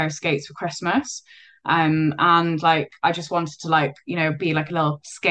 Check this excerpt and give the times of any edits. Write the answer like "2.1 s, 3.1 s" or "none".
none